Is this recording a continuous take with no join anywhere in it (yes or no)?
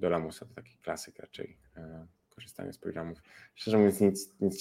yes